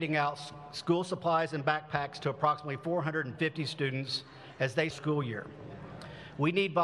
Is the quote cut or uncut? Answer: cut